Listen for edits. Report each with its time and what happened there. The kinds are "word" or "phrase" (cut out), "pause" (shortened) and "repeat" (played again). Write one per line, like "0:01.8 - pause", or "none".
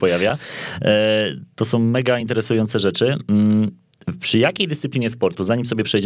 none